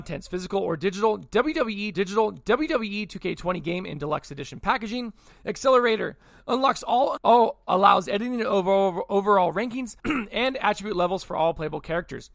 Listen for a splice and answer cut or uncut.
cut